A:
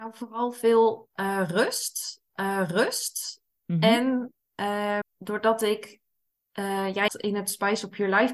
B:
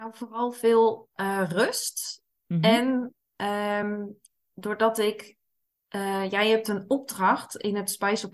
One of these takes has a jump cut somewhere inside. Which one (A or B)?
A